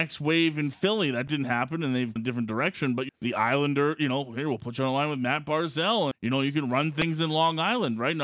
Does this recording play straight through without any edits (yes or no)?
no